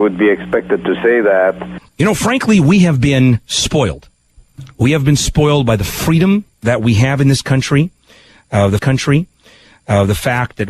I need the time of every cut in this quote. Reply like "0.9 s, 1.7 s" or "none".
1.9 s, 6.5 s, 8.8 s

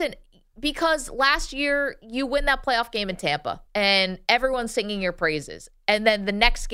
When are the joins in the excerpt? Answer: 3.7 s

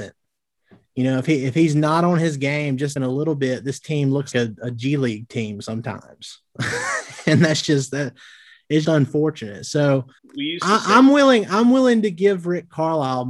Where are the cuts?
3.0 s, 4.3 s, 8.8 s, 10.2 s

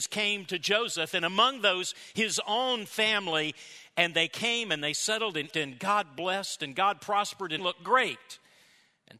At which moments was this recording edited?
5.5 s, 7.6 s

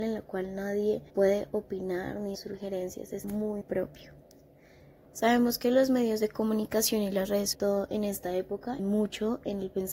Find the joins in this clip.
1.1 s, 2.3 s, 3.2 s, 3.6 s, 7.5 s, 8.8 s

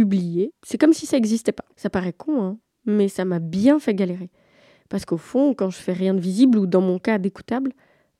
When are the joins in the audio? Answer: 1.7 s

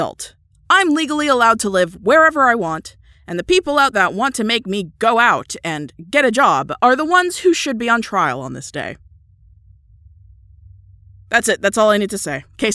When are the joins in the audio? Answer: 3.9 s

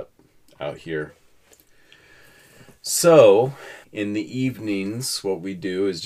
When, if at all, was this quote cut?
3.8 s

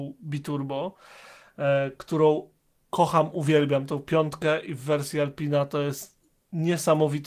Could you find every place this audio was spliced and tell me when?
none

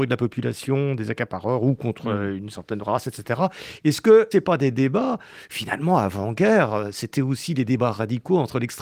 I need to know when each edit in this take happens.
4.3 s

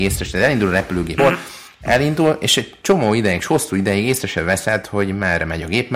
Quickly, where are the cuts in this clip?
1.2 s

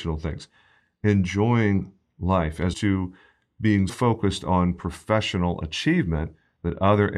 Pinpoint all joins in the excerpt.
2.7 s, 3.9 s

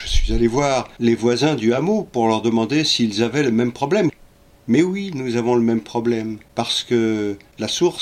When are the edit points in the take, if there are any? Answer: none

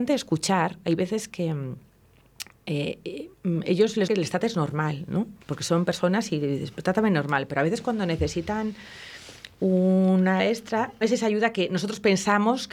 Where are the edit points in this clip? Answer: 4.1 s, 5.4 s, 10.4 s, 11.0 s

